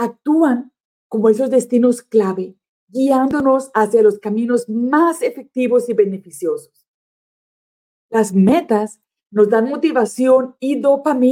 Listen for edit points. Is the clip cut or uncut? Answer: uncut